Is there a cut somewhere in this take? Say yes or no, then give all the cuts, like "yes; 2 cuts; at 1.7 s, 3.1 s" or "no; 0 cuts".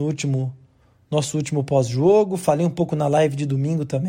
no; 0 cuts